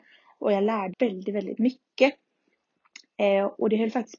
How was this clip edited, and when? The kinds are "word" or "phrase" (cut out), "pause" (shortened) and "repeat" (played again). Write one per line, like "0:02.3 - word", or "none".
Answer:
0:00.9 - word